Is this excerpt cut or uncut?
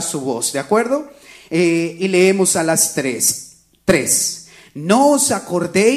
uncut